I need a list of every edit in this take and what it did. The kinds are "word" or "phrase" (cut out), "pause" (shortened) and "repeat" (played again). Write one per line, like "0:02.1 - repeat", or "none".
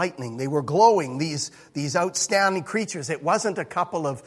none